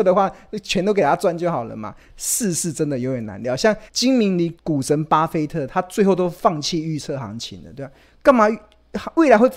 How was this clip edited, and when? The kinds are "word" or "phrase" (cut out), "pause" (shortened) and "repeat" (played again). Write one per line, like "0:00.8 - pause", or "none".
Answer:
0:03.9 - pause
0:04.6 - pause